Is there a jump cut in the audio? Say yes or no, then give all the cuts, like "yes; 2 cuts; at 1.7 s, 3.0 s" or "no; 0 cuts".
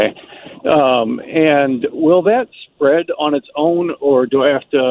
no; 0 cuts